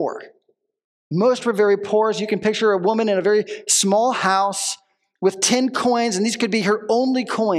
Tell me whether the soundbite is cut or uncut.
uncut